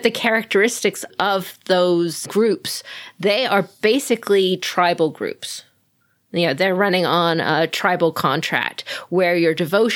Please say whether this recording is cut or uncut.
uncut